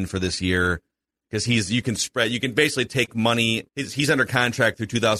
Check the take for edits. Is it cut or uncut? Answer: cut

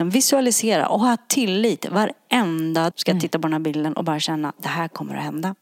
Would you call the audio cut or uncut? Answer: cut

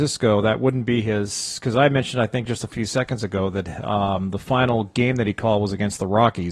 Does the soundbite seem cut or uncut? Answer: uncut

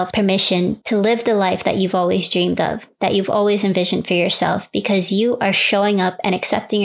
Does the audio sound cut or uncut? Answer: uncut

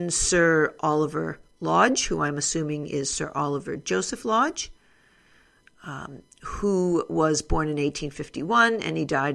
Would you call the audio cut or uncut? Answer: uncut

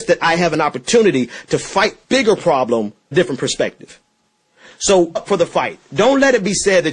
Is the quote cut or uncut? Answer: cut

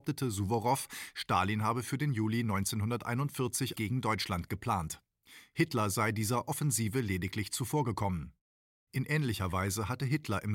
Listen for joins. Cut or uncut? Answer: cut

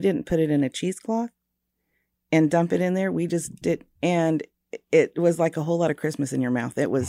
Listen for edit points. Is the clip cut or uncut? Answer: cut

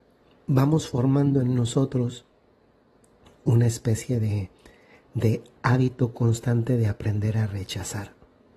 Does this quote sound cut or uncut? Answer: uncut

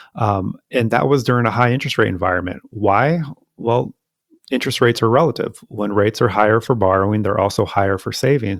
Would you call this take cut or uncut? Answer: uncut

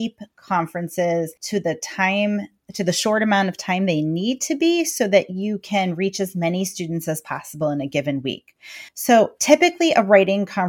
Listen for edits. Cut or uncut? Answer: cut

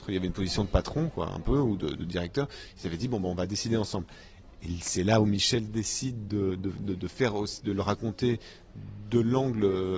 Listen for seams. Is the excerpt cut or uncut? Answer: uncut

